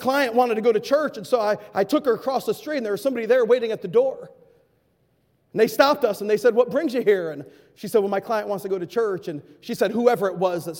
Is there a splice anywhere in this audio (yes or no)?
no